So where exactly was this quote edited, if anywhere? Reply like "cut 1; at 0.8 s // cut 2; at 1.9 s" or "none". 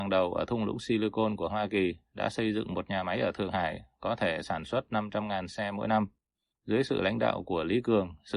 none